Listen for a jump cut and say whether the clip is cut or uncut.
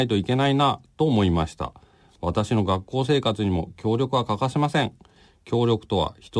uncut